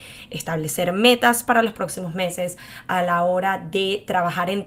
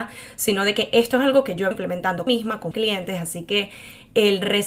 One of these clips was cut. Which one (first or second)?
second